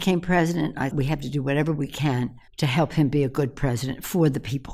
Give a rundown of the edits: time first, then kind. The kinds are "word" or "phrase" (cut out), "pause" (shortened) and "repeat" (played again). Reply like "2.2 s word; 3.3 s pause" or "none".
0.9 s word; 2.5 s pause